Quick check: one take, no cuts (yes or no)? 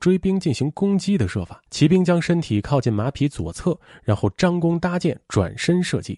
no